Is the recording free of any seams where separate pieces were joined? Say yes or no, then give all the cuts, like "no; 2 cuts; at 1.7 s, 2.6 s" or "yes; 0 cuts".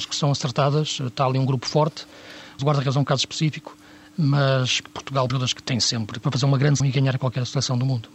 no; 6 cuts; at 2.6 s, 4.8 s, 5.3 s, 5.6 s, 6.2 s, 6.8 s